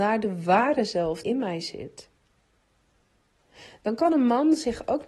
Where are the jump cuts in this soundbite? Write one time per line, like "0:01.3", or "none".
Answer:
0:01.2